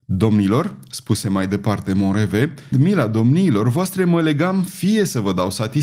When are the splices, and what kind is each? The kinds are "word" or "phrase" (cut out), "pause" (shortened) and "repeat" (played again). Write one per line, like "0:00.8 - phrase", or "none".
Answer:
0:02.7 - word

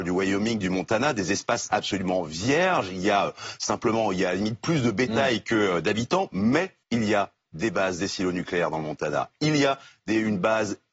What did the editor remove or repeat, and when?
0:06.8 - pause

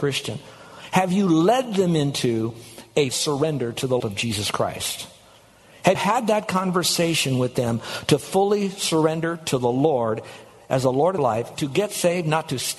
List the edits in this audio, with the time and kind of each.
0:03.1 - word
0:04.0 - word
0:05.9 - word
0:11.2 - word
0:11.5 - word

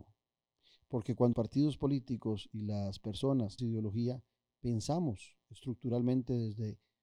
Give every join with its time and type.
0:01.3 - word
0:03.6 - word

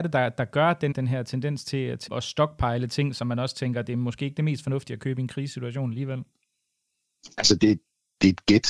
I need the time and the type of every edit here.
0:00.9 - word
0:02.1 - word

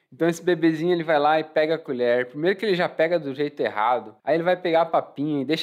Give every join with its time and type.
0:04.2 - pause

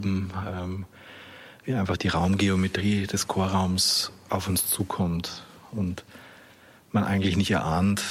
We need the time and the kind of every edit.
none

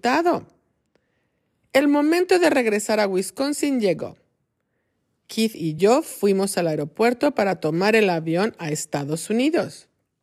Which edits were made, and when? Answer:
none

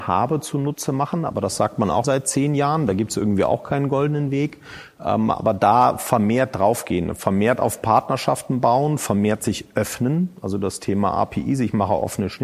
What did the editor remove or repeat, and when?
0:02.0 - word

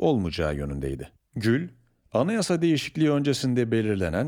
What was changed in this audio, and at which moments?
none

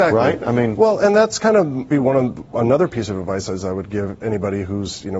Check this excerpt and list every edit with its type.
0:01.9 - phrase

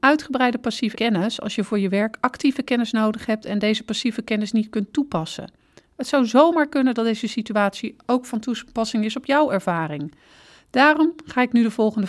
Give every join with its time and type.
0:00.9 - word

